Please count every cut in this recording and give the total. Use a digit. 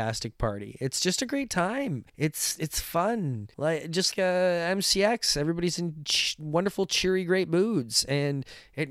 3